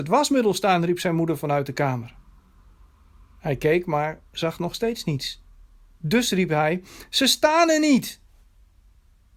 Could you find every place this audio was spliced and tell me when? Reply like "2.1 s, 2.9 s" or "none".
none